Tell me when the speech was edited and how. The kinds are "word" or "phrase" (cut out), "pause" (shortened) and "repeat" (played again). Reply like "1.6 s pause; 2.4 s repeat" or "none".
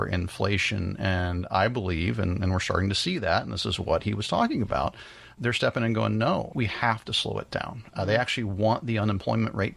none